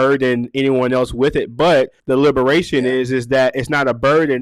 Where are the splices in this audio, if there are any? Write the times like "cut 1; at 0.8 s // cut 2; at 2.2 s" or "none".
cut 1; at 2.0 s

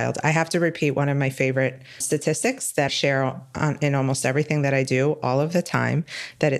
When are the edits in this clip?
cut 1; at 2.0 s // cut 2; at 2.9 s

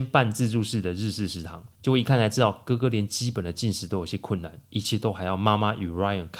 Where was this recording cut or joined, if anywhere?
cut 1; at 1.7 s

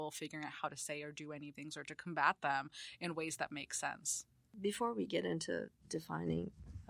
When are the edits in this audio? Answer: cut 1; at 1.5 s

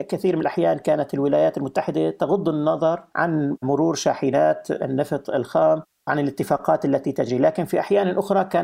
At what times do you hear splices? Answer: none

